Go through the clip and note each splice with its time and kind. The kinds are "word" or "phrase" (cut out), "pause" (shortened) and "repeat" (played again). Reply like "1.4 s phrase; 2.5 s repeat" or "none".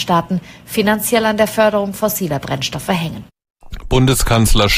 none

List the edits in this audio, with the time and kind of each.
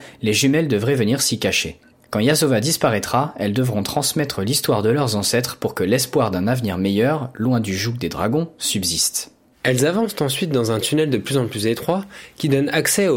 none

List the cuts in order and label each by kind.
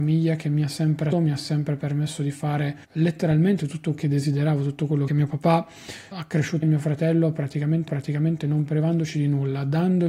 1.1 s word; 2.8 s pause; 3.9 s word; 5.1 s phrase; 6.1 s word; 6.6 s word; 7.9 s repeat

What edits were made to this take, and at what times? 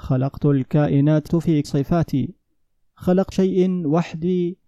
1.3 s word; 1.6 s phrase; 3.3 s word

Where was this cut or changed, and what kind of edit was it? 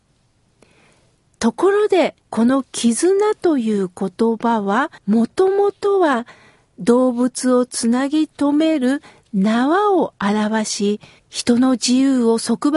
2.2 s pause; 5.0 s pause; 11.2 s pause

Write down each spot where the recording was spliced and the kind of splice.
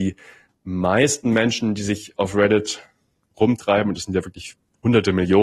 none

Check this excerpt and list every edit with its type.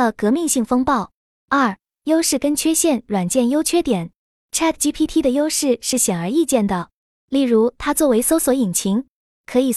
none

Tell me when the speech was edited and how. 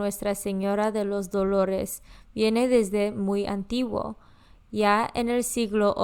none

